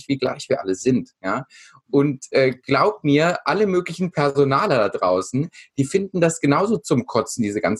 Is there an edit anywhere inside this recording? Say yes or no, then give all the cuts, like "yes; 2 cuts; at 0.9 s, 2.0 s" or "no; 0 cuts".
no; 0 cuts